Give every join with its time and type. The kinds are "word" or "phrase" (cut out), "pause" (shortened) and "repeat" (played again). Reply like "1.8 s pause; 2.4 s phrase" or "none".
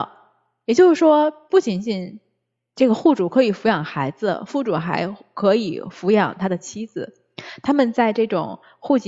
none